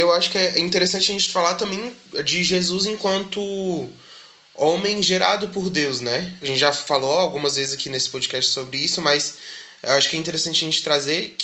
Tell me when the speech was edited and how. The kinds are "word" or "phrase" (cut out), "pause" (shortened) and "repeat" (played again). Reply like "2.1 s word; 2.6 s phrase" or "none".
none